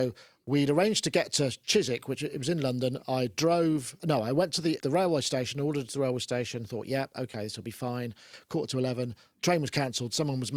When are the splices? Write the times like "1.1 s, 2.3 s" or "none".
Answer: 4.0 s, 4.8 s, 5.9 s